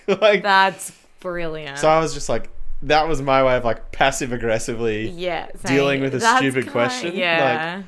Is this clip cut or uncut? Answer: uncut